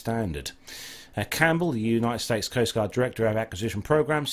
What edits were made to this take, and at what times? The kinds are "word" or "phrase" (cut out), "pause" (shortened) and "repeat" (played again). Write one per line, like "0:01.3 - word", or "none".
none